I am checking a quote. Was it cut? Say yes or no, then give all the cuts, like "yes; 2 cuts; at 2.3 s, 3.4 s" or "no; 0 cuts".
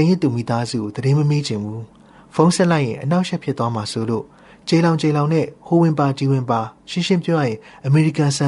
no; 0 cuts